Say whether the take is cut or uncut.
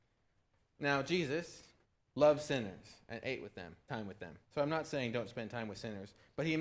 cut